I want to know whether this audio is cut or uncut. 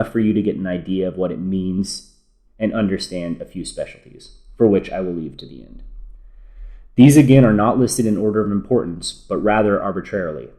uncut